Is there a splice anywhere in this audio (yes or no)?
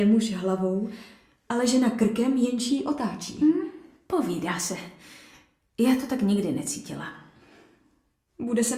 no